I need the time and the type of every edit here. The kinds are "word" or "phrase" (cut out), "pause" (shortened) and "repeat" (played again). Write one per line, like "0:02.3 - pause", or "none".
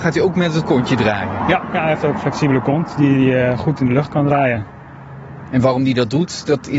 none